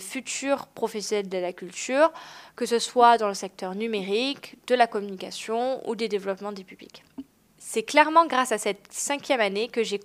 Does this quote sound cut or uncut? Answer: uncut